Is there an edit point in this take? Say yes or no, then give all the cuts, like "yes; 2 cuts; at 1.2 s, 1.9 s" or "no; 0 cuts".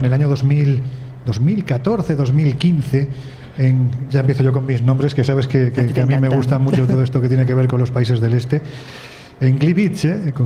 no; 0 cuts